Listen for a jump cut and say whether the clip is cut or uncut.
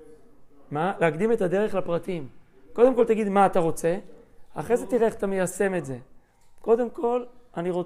uncut